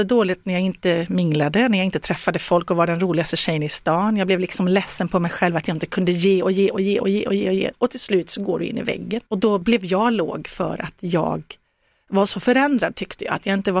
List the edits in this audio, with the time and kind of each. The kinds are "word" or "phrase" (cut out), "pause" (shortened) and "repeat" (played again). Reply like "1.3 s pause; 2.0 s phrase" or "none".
9.3 s pause